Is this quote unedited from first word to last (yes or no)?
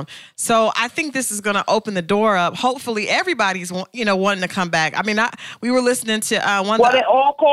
yes